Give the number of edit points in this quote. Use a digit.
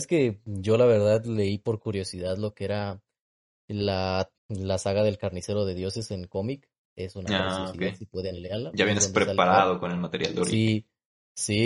1